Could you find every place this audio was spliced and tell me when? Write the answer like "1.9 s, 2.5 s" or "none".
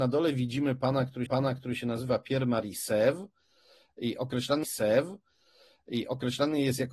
1.3 s, 4.6 s